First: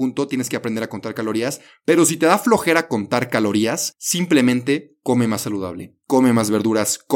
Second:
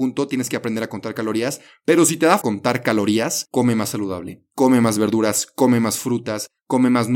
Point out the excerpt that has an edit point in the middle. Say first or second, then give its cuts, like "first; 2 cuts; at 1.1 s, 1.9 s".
second; 2 cuts; at 2.4 s, 3.5 s